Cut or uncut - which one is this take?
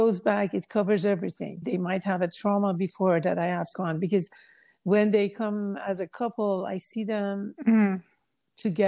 cut